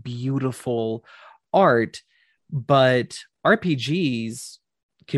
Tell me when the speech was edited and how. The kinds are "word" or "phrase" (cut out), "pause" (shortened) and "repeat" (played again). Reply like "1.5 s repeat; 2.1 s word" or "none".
none